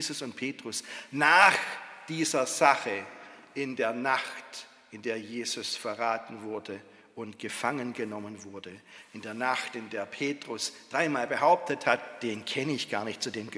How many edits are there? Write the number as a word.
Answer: zero